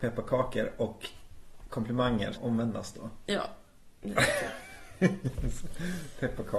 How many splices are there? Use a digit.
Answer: 1